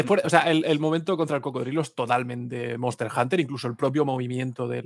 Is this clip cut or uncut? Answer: uncut